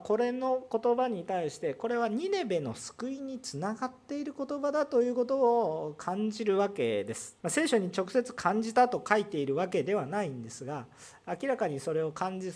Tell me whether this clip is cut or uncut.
cut